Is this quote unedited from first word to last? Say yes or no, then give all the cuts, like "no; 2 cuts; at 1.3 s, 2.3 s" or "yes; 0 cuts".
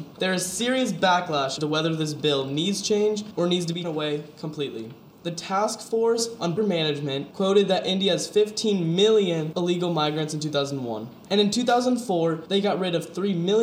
no; 3 cuts; at 1.6 s, 3.8 s, 6.6 s